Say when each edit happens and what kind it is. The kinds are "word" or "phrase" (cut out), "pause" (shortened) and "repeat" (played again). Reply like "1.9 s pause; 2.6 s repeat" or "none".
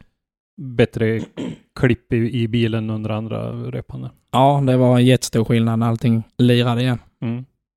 6.3 s pause